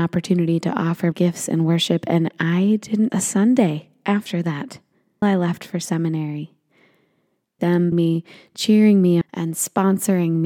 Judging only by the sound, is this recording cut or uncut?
cut